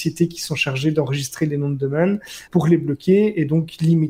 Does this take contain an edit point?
yes; 1 cut; at 2.5 s

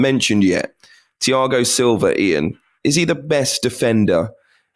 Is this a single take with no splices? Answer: yes; 0 cuts

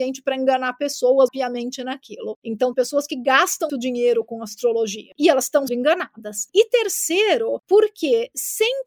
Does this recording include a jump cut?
yes; 4 cuts; at 1.3 s, 2.7 s, 3.7 s, 5.7 s

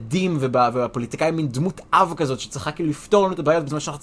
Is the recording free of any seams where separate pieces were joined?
yes; 0 cuts

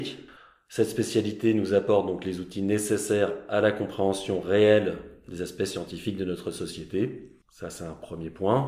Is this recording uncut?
no; 1 cut; at 7.4 s

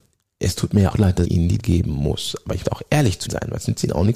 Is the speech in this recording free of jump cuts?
no; 5 cuts; at 0.9 s, 1.2 s, 1.6 s, 2.6 s, 3.3 s

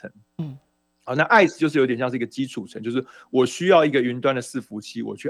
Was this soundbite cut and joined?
no; 0 cuts

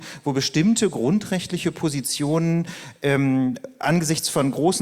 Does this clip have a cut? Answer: no; 0 cuts

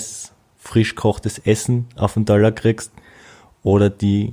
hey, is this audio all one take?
yes; 0 cuts

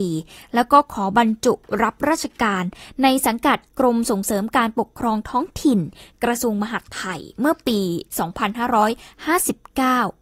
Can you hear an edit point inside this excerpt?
no; 0 cuts

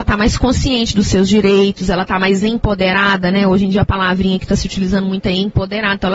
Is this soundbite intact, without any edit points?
yes; 0 cuts

